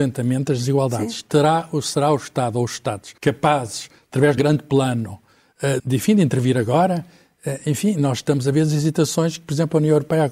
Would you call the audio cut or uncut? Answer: cut